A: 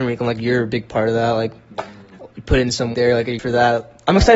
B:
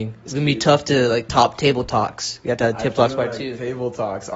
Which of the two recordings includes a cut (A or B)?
A